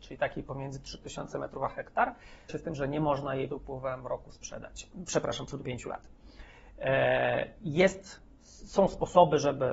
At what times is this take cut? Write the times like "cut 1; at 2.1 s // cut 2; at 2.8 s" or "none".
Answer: cut 1; at 2.5 s // cut 2; at 3.5 s // cut 3; at 5.6 s